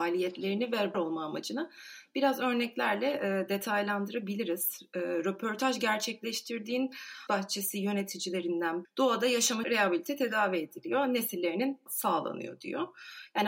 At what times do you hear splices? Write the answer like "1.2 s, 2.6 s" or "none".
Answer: 0.9 s, 7.3 s, 8.8 s, 9.6 s, 11.9 s